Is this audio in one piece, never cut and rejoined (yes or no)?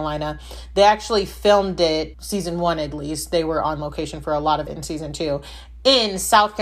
no